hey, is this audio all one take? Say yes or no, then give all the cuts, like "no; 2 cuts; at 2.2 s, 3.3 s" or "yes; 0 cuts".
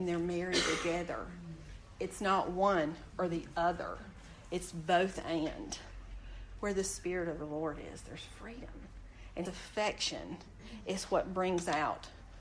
no; 1 cut; at 9.4 s